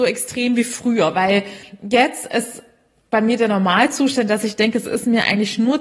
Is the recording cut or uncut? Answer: uncut